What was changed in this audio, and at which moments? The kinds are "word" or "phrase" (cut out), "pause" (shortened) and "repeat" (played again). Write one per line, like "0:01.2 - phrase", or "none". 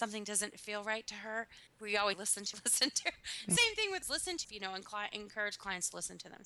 0:01.7 - pause
0:02.1 - word
0:02.5 - word
0:03.6 - phrase
0:04.0 - word
0:04.4 - word